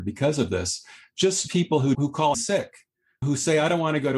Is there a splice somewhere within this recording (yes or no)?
yes